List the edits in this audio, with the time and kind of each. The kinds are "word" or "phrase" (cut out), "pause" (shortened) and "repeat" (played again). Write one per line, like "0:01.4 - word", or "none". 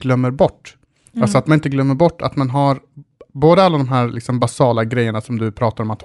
none